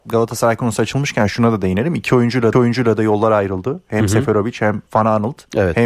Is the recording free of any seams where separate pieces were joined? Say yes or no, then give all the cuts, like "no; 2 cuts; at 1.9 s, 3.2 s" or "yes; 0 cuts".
no; 2 cuts; at 2.5 s, 4.9 s